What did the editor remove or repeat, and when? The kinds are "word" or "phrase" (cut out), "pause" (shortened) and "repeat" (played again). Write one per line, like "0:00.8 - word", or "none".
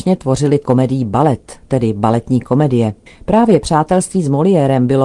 0:03.1 - pause